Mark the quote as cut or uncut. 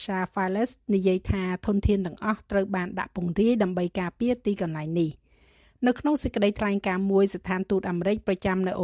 uncut